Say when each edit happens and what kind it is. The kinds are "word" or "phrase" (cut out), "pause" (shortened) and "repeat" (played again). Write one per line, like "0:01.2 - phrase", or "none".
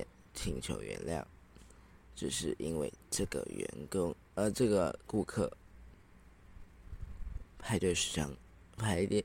none